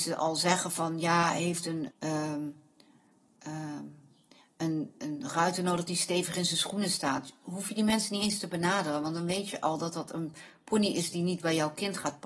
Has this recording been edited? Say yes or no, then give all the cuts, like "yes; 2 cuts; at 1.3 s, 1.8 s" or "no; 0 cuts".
yes; 1 cut; at 1.9 s